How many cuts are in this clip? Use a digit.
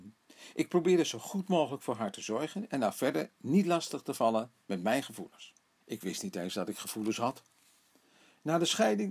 1